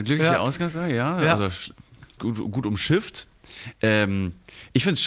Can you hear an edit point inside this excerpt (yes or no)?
yes